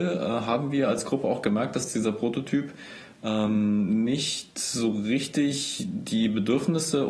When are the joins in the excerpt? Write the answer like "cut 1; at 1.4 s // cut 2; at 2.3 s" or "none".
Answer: none